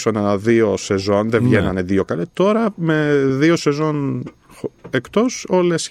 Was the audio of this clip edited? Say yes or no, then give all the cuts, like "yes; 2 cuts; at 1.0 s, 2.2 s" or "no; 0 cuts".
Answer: no; 0 cuts